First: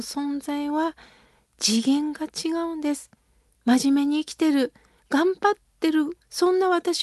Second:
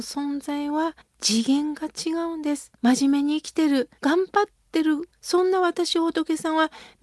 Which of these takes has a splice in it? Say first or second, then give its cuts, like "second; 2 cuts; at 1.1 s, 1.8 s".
second; 3 cuts; at 1.0 s, 2.7 s, 4.0 s